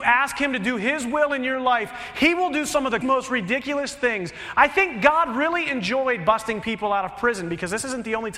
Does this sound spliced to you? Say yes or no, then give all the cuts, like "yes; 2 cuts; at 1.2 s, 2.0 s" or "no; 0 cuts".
yes; 1 cut; at 3.0 s